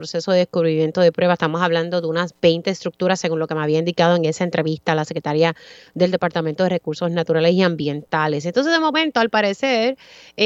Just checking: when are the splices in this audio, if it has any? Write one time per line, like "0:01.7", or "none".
none

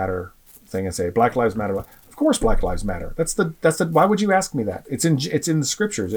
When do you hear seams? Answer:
none

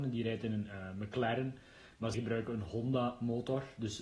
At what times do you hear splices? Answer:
0:02.1

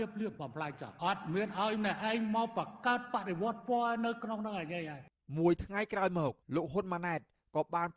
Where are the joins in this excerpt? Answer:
0:05.2
0:06.4

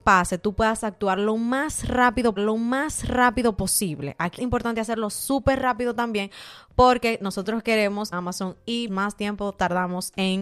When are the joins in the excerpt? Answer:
0:02.4
0:04.4
0:08.1
0:08.9

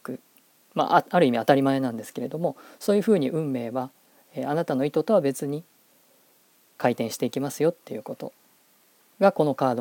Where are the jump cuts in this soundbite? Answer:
none

